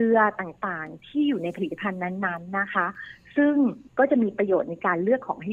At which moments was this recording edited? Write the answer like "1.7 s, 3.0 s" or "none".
3.9 s

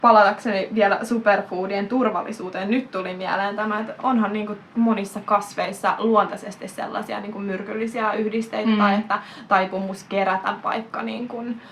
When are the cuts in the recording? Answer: 4.7 s

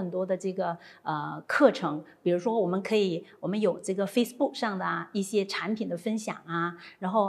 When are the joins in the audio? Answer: none

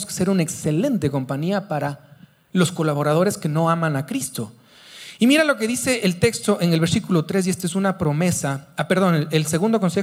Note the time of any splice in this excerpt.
none

